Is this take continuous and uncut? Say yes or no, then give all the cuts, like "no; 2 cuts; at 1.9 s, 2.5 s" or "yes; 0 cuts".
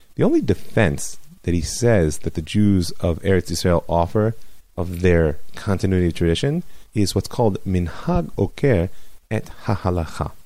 no; 3 cuts; at 1.4 s, 4.7 s, 6.9 s